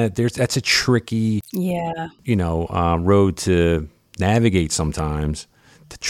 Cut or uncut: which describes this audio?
uncut